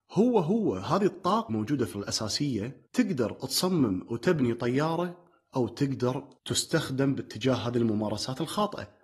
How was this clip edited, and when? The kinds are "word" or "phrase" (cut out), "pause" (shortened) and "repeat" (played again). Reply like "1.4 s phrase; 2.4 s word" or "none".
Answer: 1.5 s word; 1.9 s word; 2.9 s pause; 6.4 s pause